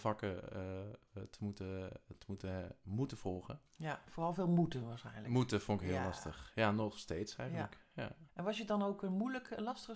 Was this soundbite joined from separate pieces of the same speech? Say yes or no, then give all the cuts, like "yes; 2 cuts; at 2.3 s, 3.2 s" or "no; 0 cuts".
yes; 1 cut; at 8.3 s